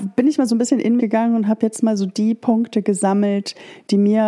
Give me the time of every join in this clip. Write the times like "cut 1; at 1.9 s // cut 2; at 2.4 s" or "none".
cut 1; at 1.0 s